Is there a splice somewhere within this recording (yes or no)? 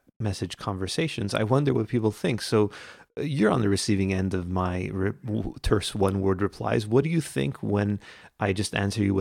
no